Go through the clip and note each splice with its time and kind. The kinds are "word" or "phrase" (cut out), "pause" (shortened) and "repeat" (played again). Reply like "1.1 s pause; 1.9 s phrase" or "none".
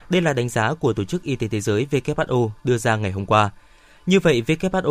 none